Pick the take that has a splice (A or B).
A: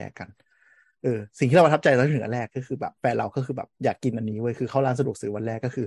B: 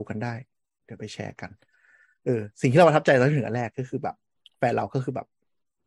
A